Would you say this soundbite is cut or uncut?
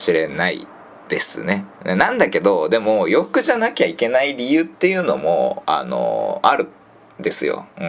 cut